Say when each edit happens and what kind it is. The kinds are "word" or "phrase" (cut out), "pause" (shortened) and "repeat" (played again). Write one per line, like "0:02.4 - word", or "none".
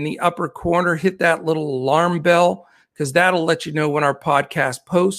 none

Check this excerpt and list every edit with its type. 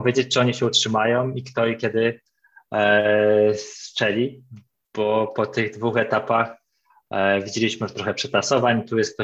none

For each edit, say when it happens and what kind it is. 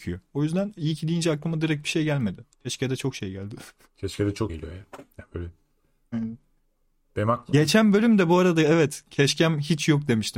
0:02.5 - pause
0:04.5 - word

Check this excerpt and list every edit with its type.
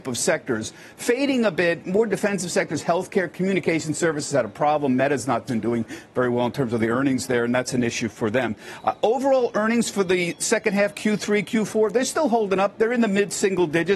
none

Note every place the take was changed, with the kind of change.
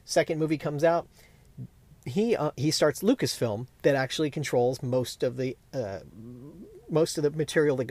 none

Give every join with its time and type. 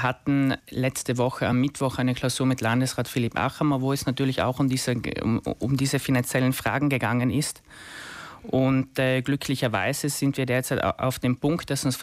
none

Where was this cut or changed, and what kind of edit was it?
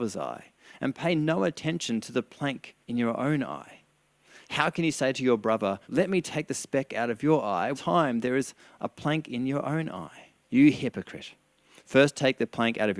0:02.8 - pause
0:05.8 - pause
0:07.7 - phrase
0:10.4 - pause

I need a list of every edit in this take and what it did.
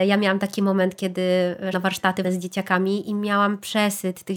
0:01.7 - word
0:02.2 - word

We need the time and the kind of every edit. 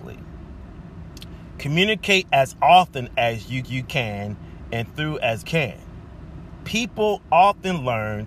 0:03.6 - repeat
0:05.4 - phrase

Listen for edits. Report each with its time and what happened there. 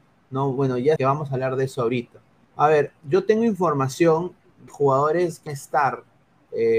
0:01.0 - phrase
0:02.4 - pause
0:04.7 - word
0:05.5 - word

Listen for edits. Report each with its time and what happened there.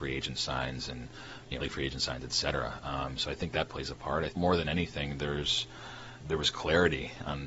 0:01.6 - word
0:03.7 - word
0:04.3 - word
0:06.2 - word

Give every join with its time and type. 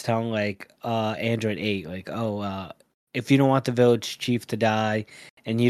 none

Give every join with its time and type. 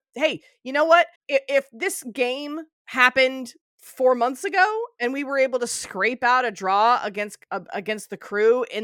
0:01.1 - pause
0:02.7 - pause
0:07.4 - pause

